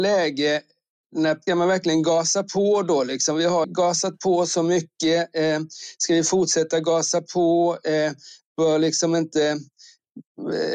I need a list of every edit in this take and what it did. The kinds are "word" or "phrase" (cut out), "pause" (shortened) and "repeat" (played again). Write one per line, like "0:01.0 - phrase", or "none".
0:01.5 - word
0:03.6 - word